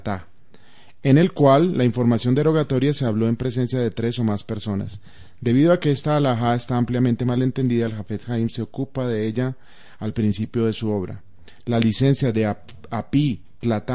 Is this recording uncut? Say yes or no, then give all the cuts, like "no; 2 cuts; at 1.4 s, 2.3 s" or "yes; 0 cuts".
yes; 0 cuts